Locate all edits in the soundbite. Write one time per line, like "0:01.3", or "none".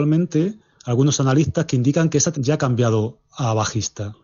0:02.3